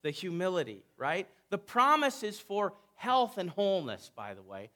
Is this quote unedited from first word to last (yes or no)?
yes